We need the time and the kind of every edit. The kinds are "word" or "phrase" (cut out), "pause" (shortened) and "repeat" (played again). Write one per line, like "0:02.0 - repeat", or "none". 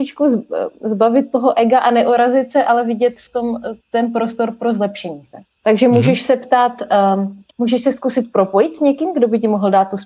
0:03.8 - pause
0:05.5 - pause
0:07.5 - pause

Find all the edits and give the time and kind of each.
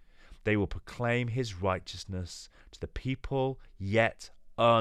none

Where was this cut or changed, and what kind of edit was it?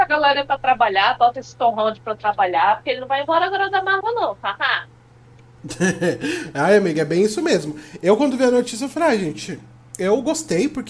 none

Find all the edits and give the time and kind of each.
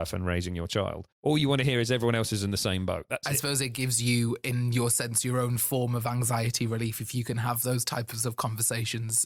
0:01.1 - pause

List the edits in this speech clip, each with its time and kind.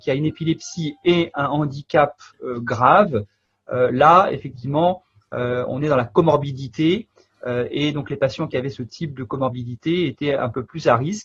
none

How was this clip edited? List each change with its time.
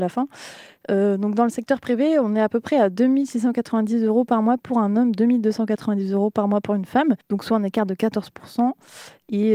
0:07.2 - pause

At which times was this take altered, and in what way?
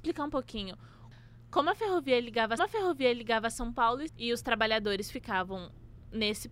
0:02.6 - repeat
0:04.1 - word

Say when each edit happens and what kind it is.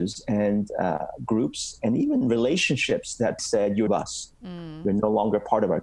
0:03.4 - word
0:03.9 - phrase

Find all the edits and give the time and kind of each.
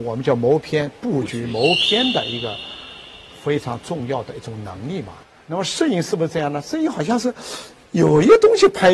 none

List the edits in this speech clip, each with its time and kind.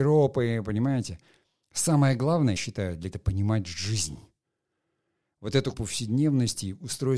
0:02.6 - word
0:03.1 - word
0:05.7 - word

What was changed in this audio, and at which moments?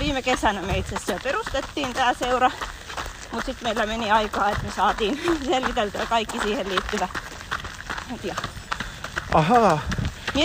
0:08.2 - word

